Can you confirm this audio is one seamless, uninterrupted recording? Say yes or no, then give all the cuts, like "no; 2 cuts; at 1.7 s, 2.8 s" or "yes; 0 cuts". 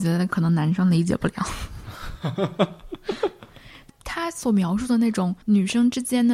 no; 1 cut; at 5.4 s